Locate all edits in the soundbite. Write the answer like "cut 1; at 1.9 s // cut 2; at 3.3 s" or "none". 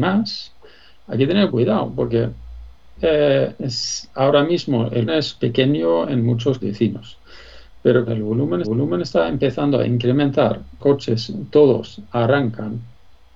cut 1; at 1.5 s // cut 2; at 3.0 s // cut 3; at 5.1 s // cut 4; at 6.6 s // cut 5; at 8.1 s // cut 6; at 8.6 s // cut 7; at 10.8 s